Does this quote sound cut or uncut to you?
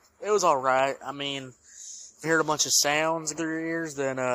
cut